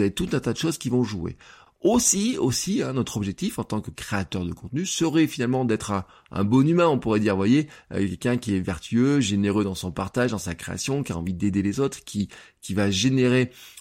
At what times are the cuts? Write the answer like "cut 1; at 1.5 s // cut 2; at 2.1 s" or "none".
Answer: none